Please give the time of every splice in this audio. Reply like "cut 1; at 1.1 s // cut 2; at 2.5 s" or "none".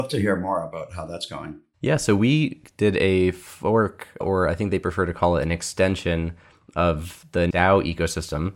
cut 1; at 4.2 s // cut 2; at 7.5 s